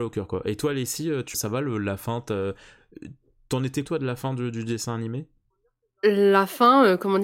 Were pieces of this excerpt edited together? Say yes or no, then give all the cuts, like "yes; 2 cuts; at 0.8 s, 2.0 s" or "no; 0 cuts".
yes; 2 cuts; at 1.3 s, 3.8 s